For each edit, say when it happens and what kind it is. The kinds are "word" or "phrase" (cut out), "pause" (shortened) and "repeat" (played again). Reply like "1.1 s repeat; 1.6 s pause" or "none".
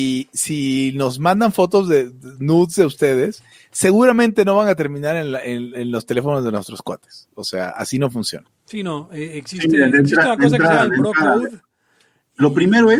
none